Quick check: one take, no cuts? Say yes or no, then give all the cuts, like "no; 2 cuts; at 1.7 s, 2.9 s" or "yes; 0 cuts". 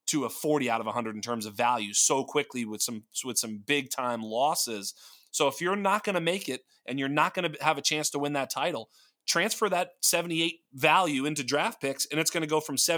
yes; 0 cuts